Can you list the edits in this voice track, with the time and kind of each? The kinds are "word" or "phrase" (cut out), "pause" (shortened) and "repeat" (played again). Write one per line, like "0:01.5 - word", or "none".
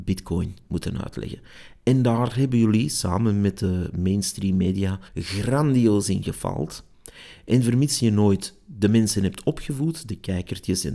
0:05.1 - pause